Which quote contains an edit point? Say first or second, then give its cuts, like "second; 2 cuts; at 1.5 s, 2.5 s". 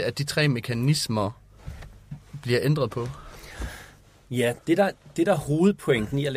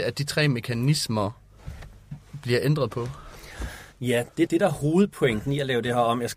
second; 2 cuts; at 3.9 s, 4.5 s